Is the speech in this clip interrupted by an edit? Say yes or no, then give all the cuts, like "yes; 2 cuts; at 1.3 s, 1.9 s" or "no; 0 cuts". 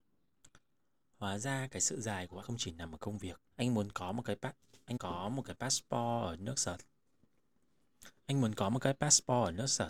yes; 3 cuts; at 2.4 s, 3.5 s, 5.0 s